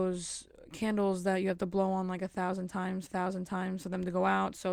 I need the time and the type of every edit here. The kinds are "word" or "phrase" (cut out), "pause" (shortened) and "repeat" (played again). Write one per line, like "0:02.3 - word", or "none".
0:03.1 - repeat